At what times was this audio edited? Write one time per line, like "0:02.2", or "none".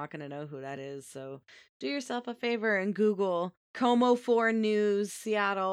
0:03.6